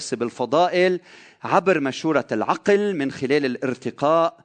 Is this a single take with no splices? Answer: yes; 0 cuts

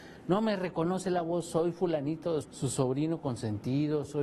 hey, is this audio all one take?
no; 1 cut; at 2.4 s

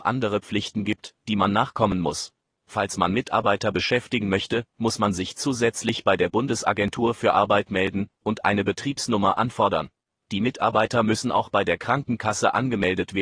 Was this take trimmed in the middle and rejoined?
no; 0 cuts

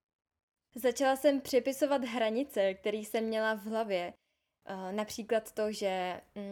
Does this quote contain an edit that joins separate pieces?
no; 0 cuts

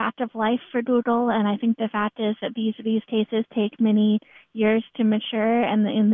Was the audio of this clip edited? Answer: no; 0 cuts

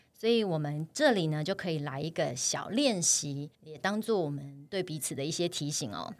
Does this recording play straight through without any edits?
no; 1 cut; at 3.5 s

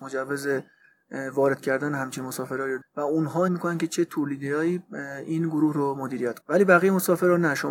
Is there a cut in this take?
yes; 3 cuts; at 2.8 s, 3.5 s, 6.4 s

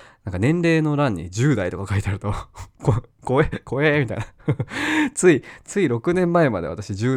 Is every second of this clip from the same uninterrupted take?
yes; 0 cuts

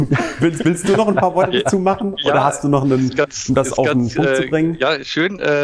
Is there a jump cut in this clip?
no; 0 cuts

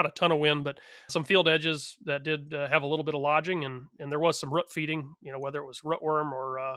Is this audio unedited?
no; 1 cut; at 1.1 s

